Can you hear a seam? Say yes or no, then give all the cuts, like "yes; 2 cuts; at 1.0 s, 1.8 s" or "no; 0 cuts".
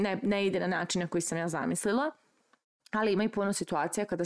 no; 0 cuts